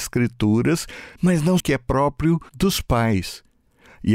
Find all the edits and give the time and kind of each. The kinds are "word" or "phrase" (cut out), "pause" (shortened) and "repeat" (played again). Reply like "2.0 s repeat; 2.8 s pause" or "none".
1.2 s pause; 1.6 s phrase; 2.5 s pause